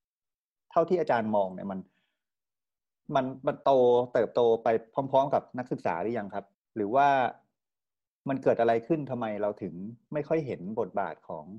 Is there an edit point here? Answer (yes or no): yes